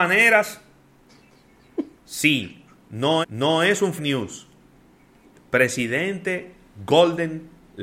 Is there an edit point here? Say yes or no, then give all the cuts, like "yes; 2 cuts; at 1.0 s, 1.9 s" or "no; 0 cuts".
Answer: yes; 2 cuts; at 3.2 s, 4.0 s